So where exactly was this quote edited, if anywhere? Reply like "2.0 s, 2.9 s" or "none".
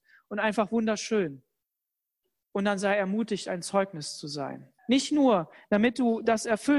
1.9 s, 4.8 s